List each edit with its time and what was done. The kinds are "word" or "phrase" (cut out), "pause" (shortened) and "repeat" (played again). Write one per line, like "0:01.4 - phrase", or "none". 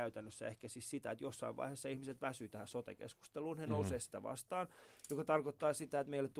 none